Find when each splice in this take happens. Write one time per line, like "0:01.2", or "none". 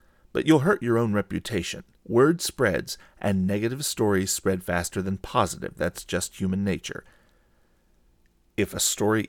0:02.0

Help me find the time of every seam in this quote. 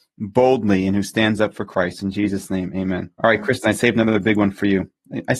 0:03.1

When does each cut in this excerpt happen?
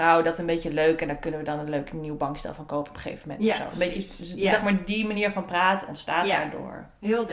none

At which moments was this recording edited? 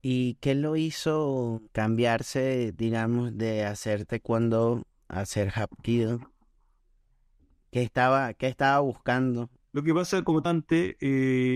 0:01.7
0:10.5

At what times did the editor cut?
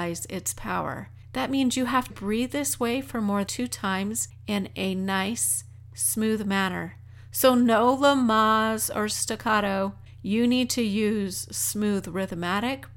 0:02.1
0:03.5

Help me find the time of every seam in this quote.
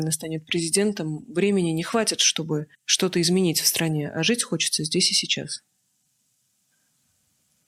0:02.7

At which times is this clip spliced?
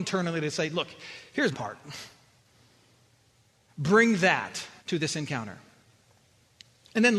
0:01.5
0:04.8

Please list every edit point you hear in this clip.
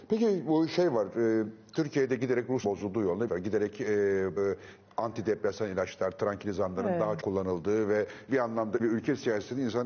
0:02.6
0:03.3
0:04.4
0:07.2
0:08.3
0:08.8

